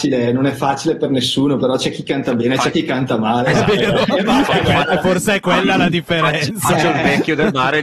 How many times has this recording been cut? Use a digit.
0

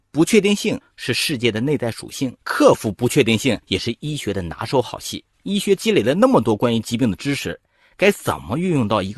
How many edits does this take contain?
3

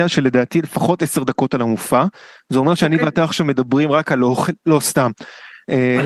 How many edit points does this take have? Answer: 0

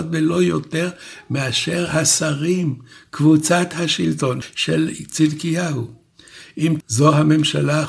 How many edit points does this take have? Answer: 1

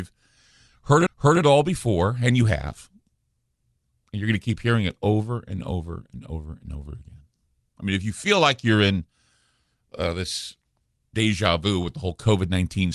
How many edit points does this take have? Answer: 2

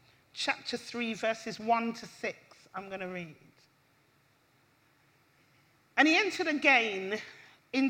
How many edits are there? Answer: 0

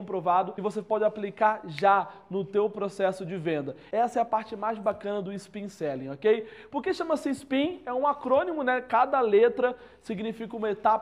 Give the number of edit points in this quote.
0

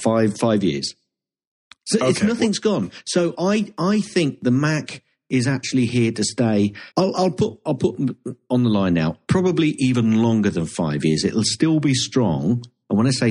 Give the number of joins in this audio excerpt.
1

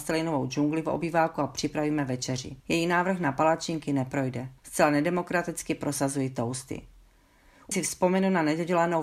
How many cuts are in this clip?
3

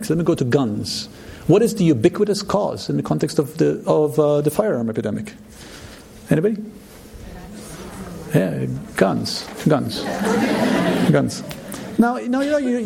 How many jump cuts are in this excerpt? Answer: 0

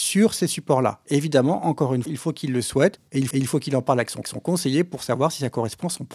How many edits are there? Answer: 3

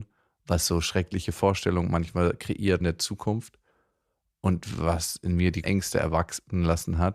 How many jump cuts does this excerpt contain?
2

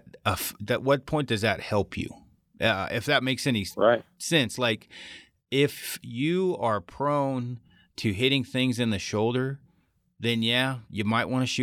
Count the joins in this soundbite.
0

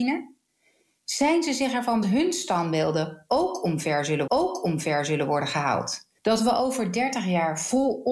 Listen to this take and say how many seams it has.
3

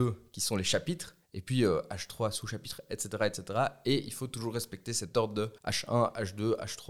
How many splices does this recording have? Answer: 2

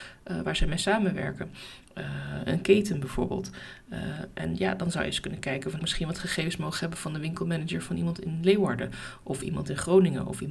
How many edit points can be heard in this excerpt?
1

